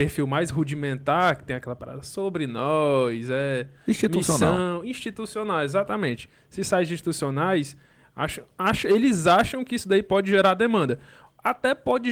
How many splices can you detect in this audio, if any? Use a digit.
0